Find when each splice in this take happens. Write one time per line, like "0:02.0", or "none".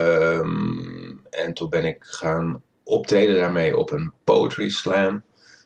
none